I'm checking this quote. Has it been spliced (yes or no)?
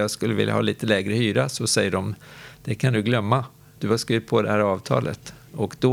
no